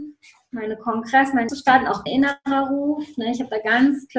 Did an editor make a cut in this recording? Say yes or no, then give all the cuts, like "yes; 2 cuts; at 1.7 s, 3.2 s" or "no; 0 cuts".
yes; 2 cuts; at 1.5 s, 2.1 s